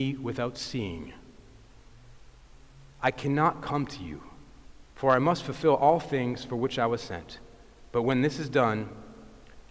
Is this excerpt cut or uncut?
cut